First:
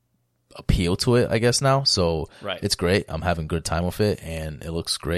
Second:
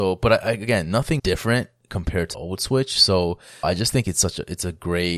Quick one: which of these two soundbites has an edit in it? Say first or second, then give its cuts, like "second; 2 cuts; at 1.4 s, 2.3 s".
second; 3 cuts; at 1.2 s, 2.3 s, 3.6 s